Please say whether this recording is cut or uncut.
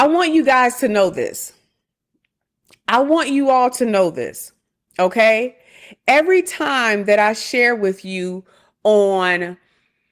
uncut